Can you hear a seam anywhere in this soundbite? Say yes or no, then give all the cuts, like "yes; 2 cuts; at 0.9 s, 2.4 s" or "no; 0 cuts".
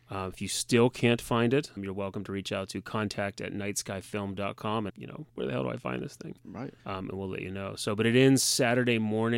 yes; 4 cuts; at 1.8 s, 4.9 s, 5.3 s, 6.8 s